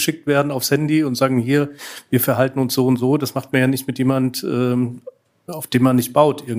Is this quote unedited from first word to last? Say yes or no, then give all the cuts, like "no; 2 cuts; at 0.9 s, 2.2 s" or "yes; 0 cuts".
yes; 0 cuts